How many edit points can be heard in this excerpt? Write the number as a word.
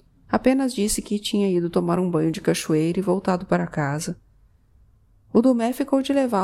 zero